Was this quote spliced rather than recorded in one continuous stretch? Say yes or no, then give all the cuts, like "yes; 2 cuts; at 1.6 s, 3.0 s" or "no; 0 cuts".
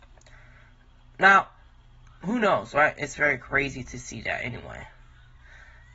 no; 0 cuts